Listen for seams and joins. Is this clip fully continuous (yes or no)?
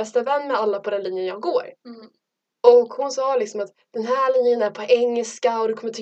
yes